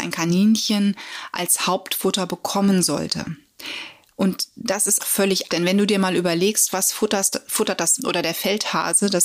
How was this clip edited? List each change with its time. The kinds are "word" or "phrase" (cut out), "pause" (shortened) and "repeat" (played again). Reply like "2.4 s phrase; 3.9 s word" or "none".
5.0 s word; 5.5 s word; 8.0 s word